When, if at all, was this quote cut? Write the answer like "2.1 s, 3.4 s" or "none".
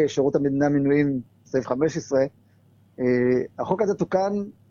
none